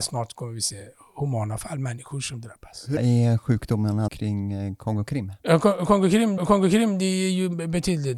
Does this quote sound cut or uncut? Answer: cut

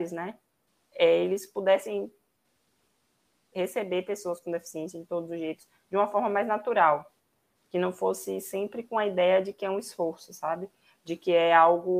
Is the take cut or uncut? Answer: uncut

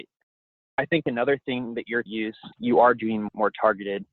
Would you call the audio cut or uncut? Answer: cut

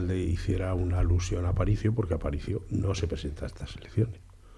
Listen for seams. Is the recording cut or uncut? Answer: uncut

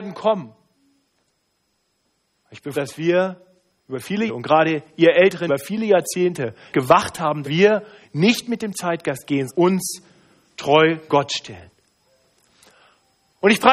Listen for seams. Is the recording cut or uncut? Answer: cut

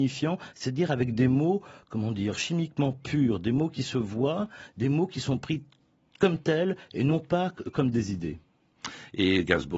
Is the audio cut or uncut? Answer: uncut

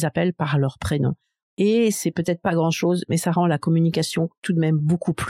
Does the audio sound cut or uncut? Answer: uncut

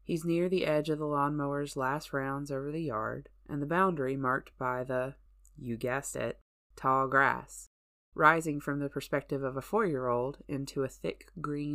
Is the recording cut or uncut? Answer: uncut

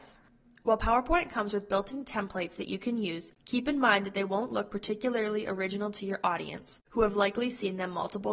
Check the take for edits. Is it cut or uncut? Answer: cut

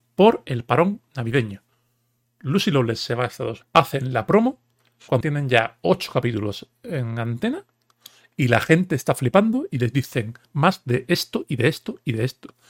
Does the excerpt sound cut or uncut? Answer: cut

